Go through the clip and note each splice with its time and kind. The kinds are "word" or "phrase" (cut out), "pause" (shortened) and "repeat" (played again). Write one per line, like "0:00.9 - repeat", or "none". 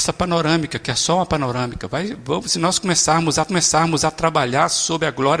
0:03.5 - repeat